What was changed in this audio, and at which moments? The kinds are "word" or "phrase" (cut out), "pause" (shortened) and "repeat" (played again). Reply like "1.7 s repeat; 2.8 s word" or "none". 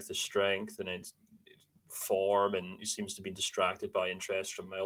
none

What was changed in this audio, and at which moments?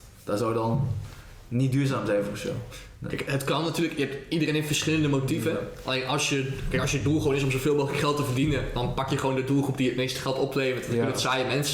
none

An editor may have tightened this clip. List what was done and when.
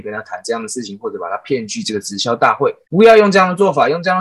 2.8 s pause

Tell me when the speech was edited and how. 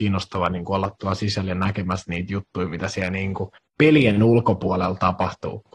3.6 s pause

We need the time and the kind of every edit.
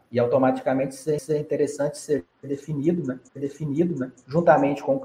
1.2 s repeat; 3.3 s repeat

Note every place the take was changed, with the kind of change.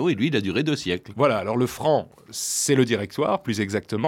none

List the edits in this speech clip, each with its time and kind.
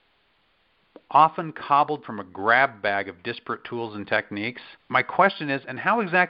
2.0 s word; 4.8 s pause

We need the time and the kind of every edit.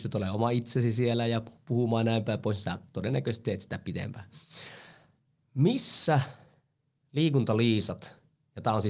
none

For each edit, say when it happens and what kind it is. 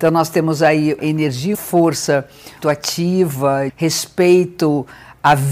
1.0 s word; 1.5 s word; 2.6 s word; 3.7 s word

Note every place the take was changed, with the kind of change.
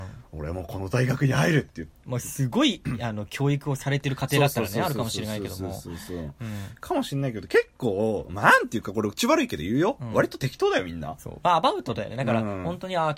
11.2 s phrase

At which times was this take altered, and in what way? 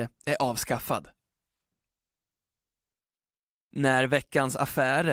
none

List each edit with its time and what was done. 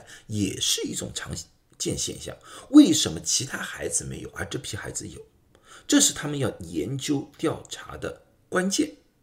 none

